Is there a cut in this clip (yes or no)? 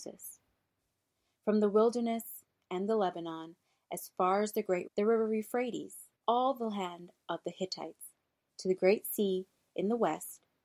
yes